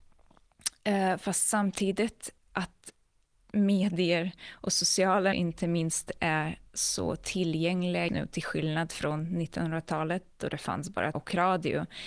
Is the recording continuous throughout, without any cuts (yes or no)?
no